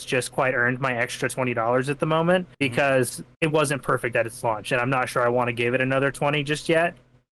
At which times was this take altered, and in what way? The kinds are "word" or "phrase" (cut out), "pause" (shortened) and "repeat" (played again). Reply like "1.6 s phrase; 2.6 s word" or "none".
2.5 s pause; 3.3 s pause